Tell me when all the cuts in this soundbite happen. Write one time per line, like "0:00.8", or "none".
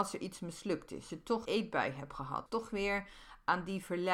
0:01.1
0:01.4
0:02.5